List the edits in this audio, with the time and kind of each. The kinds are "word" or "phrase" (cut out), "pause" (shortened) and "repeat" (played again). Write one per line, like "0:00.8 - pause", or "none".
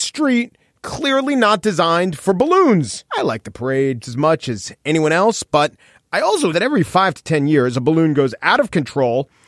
0:03.1 - pause
0:04.0 - word
0:06.5 - word